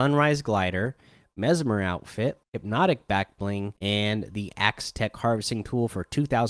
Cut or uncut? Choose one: cut